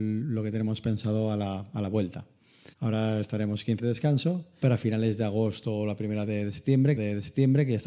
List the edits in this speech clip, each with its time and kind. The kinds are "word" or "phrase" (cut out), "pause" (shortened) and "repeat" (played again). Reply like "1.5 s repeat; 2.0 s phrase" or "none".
2.7 s pause; 3.8 s phrase; 4.6 s word; 7.0 s repeat